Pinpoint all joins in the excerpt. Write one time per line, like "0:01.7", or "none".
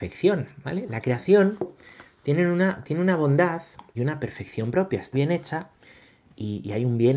0:03.9
0:05.1